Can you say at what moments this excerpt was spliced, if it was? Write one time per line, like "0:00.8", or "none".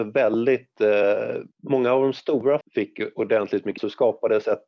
0:01.5
0:02.6
0:03.8